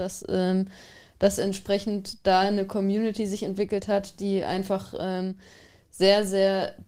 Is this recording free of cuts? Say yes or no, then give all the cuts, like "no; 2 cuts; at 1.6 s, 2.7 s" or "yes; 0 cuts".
yes; 0 cuts